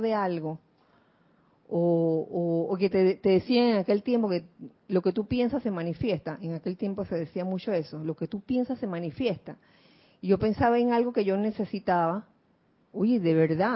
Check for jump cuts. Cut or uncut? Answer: uncut